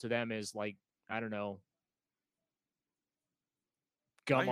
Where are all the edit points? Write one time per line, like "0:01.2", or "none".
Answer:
none